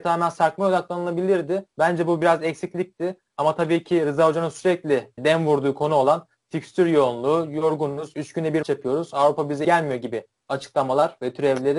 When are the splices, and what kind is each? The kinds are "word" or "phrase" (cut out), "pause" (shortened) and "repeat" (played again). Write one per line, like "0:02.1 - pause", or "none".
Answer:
0:01.7 - pause
0:05.2 - word
0:08.6 - word
0:09.6 - word